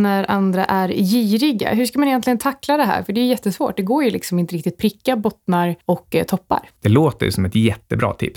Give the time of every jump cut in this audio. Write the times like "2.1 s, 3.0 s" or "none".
none